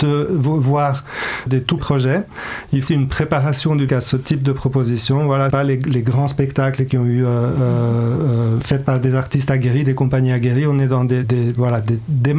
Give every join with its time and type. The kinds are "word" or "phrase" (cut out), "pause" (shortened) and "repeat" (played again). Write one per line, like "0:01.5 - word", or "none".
0:01.5 - word
0:01.8 - word
0:02.9 - word
0:03.9 - word
0:05.5 - word
0:08.6 - word
0:11.2 - word